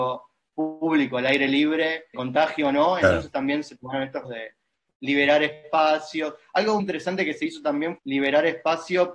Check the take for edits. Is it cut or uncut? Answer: cut